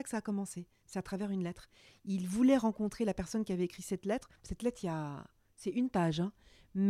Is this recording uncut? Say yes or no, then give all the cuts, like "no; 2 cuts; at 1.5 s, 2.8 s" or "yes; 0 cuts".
no; 1 cut; at 4.4 s